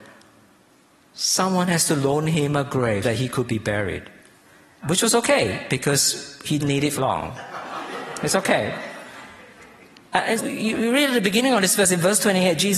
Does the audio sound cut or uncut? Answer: cut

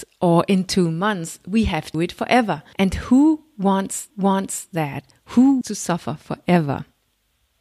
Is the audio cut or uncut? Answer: cut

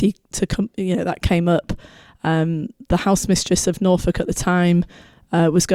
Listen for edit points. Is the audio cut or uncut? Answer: uncut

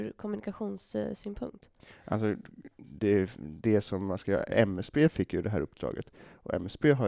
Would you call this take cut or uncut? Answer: uncut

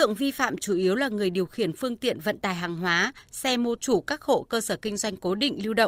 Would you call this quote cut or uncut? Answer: cut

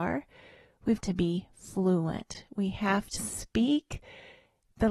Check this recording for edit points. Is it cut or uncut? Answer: cut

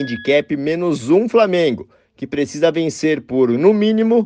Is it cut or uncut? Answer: uncut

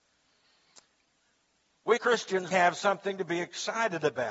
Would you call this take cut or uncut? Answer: cut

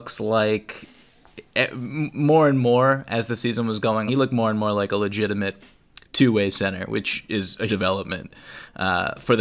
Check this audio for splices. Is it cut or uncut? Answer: cut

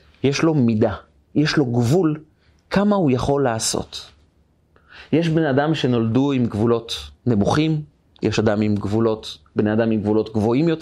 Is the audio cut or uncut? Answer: uncut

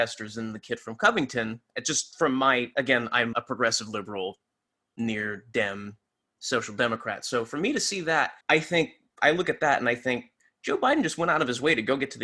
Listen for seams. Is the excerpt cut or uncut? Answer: cut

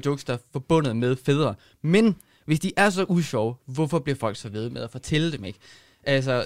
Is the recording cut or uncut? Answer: uncut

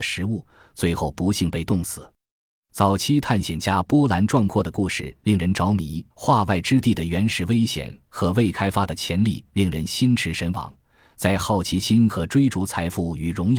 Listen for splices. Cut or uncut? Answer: cut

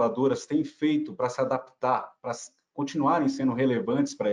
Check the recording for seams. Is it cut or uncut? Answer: uncut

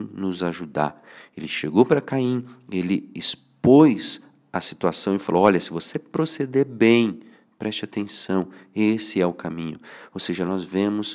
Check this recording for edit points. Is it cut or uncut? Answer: uncut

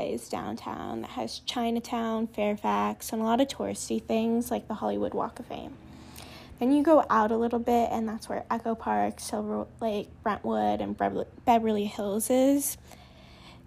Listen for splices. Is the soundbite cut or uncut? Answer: uncut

